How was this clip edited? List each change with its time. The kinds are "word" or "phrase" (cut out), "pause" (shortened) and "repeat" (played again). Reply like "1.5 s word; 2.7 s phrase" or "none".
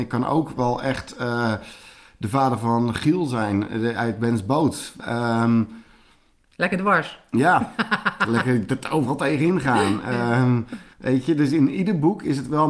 10.9 s pause